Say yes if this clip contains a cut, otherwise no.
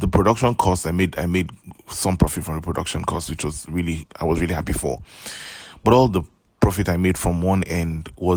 no